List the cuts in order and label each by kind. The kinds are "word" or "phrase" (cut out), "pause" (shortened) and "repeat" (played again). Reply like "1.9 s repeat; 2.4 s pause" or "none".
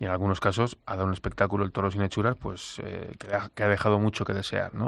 none